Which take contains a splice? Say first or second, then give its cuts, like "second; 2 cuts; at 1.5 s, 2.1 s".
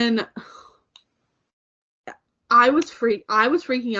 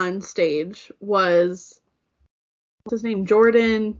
second; 1 cut; at 2.9 s